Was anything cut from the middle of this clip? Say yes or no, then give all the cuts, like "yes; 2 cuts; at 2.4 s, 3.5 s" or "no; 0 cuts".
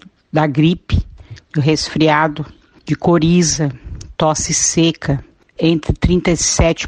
yes; 1 cut; at 5.6 s